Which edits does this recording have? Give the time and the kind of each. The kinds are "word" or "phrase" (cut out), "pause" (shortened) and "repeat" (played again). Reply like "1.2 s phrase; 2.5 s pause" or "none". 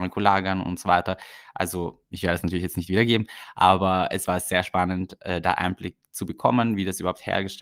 none

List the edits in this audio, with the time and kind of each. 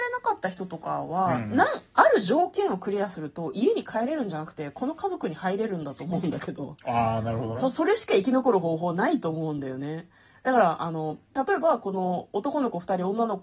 none

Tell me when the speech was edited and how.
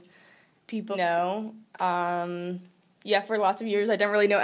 0.9 s phrase; 1.7 s pause

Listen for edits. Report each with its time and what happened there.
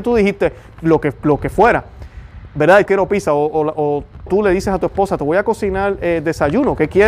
2.9 s phrase; 4.3 s phrase

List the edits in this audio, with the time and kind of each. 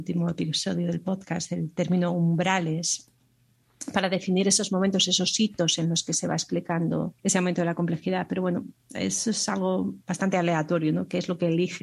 7.2 s pause

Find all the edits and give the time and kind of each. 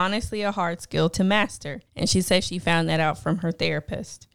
1.9 s pause

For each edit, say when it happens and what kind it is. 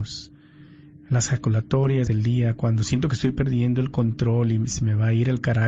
2.1 s word

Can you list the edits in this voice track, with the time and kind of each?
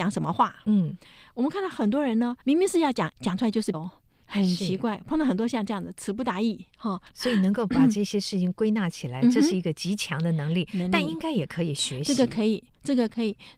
2.4 s pause; 3.1 s word; 3.7 s word; 7.1 s pause

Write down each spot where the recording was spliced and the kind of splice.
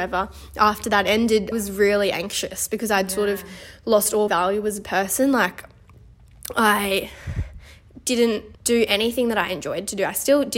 1.5 s word; 4.3 s word; 8.5 s pause

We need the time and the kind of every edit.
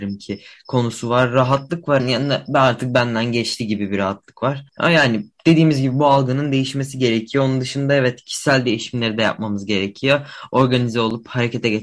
2.0 s phrase; 4.7 s pause

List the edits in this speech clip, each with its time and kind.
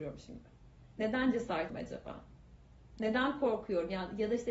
1.7 s word

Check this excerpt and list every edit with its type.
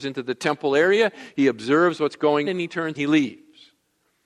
2.4 s word; 2.9 s word

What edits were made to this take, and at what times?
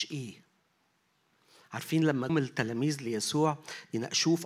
2.3 s word

